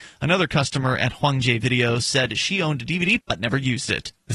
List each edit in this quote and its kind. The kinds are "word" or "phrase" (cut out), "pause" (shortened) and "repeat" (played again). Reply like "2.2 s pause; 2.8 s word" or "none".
3.2 s word